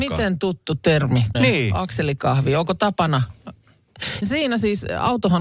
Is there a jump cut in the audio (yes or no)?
yes